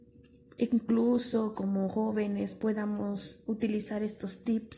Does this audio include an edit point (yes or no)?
no